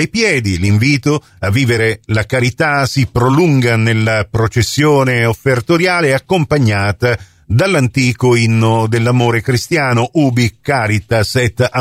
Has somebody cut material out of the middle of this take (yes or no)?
no